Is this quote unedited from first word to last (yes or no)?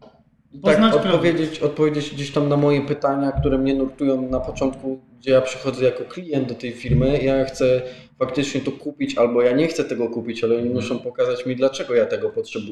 yes